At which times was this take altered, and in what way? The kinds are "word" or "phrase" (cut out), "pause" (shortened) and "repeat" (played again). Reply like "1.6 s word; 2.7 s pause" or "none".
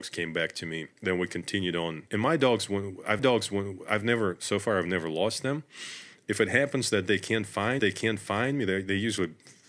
0.9 s pause; 2.1 s pause; 3.2 s repeat; 7.8 s repeat